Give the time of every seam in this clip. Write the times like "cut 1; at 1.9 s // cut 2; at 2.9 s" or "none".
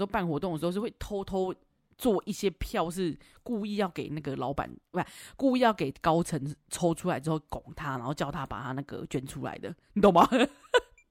none